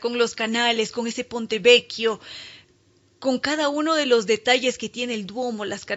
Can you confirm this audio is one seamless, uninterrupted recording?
yes; 0 cuts

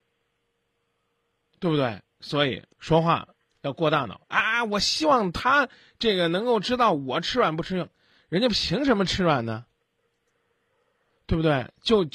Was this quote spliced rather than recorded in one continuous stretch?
yes; 1 cut; at 2.7 s

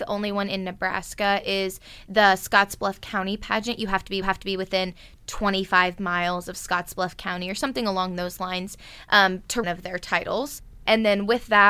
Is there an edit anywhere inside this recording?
yes; 2 cuts; at 4.2 s, 9.6 s

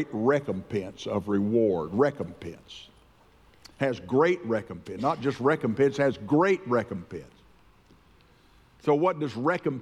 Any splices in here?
no; 0 cuts

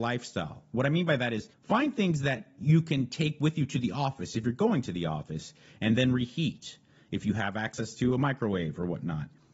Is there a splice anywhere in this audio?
yes; 1 cut; at 1.5 s

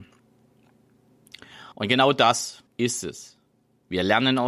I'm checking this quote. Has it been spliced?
yes; 2 cuts; at 1.7 s, 2.7 s

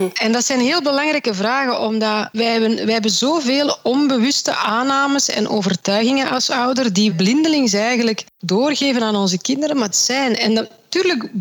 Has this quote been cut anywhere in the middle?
yes; 3 cuts; at 2.3 s, 7.1 s, 9.9 s

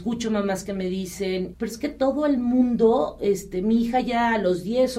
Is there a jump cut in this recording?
yes; 1 cut; at 1.5 s

